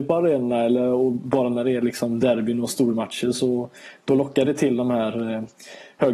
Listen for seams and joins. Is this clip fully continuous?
yes; 0 cuts

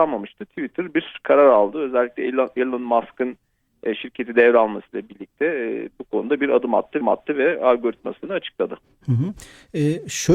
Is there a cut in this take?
yes; 1 cut; at 7.0 s

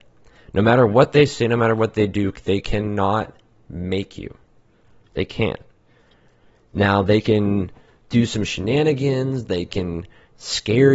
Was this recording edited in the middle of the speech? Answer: no; 0 cuts

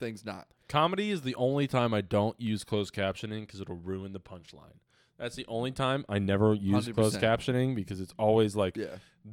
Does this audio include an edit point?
no; 0 cuts

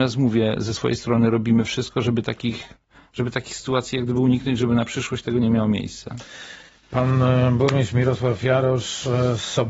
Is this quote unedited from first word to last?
yes; 0 cuts

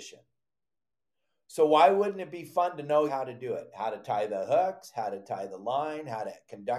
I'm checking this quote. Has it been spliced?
yes; 1 cut; at 3.1 s

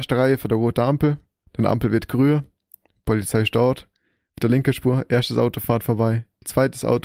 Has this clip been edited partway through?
no; 0 cuts

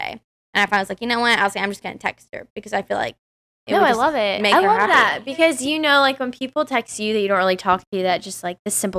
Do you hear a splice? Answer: no; 0 cuts

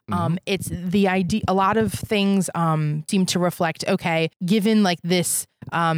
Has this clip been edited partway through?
yes; 2 cuts; at 3.1 s, 4.3 s

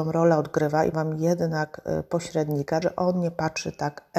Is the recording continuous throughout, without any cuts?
no; 2 cuts; at 0.9 s, 2.8 s

